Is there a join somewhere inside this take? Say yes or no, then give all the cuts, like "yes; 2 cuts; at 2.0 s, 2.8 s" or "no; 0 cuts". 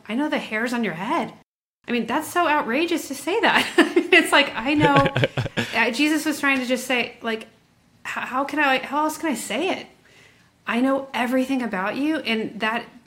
no; 0 cuts